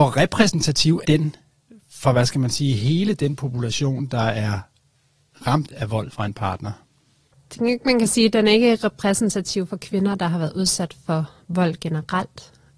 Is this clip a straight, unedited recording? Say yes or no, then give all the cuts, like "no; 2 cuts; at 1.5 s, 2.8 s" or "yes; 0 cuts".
no; 1 cut; at 1.0 s